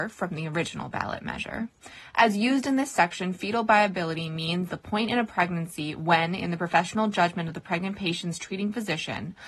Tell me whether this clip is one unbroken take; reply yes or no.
yes